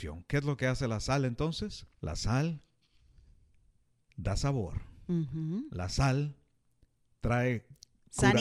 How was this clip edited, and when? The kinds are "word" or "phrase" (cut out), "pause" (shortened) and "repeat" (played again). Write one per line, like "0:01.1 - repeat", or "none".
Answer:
0:01.9 - pause